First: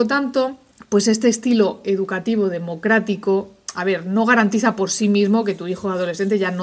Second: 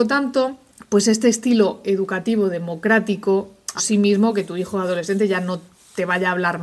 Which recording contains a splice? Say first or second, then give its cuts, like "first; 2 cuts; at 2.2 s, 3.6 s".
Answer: second; 1 cut; at 3.8 s